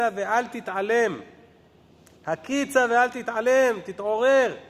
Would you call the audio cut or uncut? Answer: uncut